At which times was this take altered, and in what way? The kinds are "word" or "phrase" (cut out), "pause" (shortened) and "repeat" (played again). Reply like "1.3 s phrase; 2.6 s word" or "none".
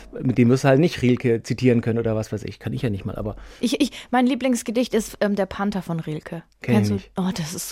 none